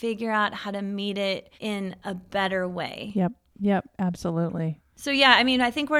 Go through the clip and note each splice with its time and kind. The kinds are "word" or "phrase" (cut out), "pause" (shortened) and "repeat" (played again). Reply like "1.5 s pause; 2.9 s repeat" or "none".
1.6 s pause